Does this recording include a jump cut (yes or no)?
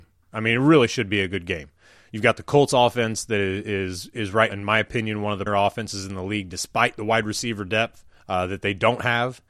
yes